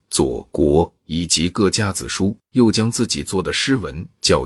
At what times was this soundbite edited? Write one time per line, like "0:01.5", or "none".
0:02.4